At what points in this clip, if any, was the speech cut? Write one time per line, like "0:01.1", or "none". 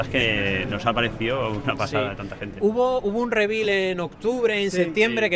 none